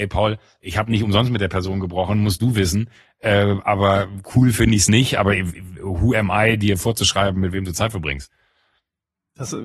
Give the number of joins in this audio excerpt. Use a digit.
0